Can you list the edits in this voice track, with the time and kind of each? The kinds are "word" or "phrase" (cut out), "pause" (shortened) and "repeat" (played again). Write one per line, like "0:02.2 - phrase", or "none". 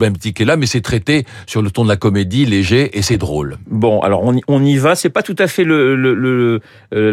none